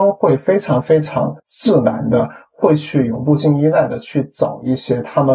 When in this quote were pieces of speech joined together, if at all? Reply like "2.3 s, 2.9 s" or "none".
1.4 s

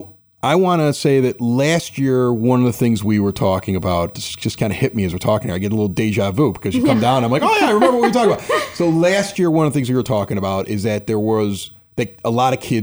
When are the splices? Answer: none

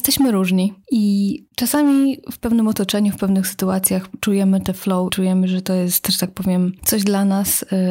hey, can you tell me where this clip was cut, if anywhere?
1.5 s, 5.1 s

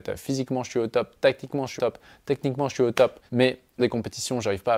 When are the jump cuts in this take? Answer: 1.8 s, 3.3 s, 3.8 s

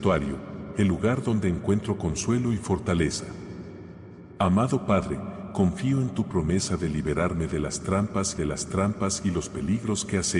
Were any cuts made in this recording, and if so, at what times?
8.4 s

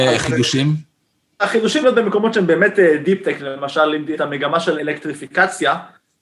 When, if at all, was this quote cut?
1.8 s, 4.1 s, 4.8 s

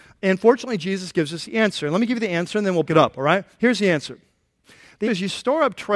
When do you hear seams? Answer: 2.9 s, 5.1 s

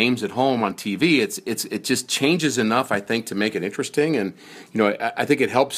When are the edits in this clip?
none

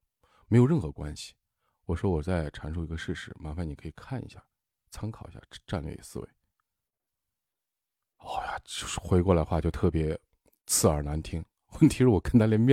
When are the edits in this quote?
none

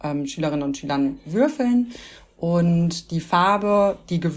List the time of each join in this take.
none

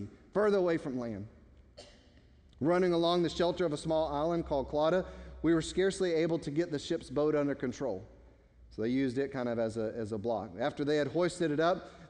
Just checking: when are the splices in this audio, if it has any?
none

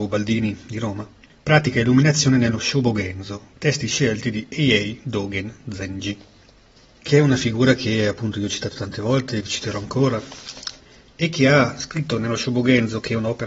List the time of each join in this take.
none

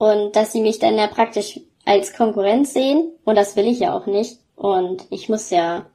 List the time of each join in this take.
4.5 s

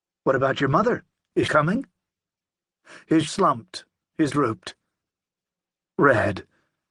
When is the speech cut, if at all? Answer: 1.5 s, 3.3 s, 4.3 s

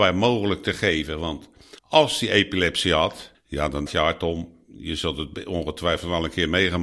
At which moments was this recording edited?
1.8 s, 3.3 s, 3.9 s

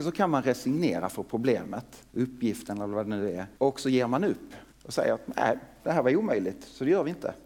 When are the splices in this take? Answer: 2.1 s, 3.6 s, 4.7 s

